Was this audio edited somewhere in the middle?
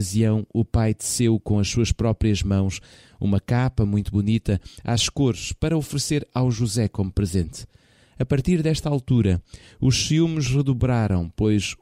no; 0 cuts

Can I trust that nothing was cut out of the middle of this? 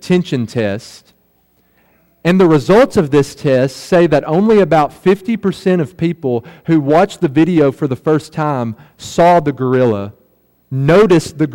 yes; 0 cuts

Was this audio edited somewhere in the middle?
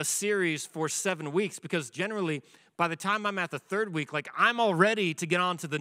no; 0 cuts

